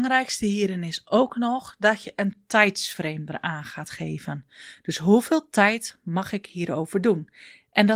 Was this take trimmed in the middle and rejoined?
no; 0 cuts

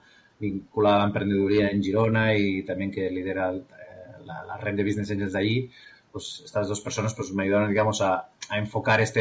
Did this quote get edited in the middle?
no; 0 cuts

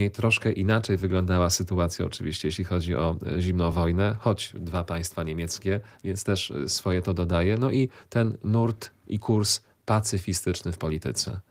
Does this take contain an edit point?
no; 0 cuts

